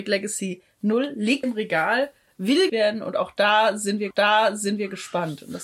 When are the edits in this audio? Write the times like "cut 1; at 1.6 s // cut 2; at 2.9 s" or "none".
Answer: cut 1; at 1.4 s // cut 2; at 2.7 s // cut 3; at 4.1 s